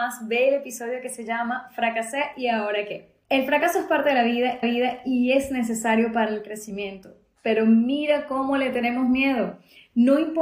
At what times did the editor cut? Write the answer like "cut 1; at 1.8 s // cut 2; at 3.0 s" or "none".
cut 1; at 3.2 s // cut 2; at 4.6 s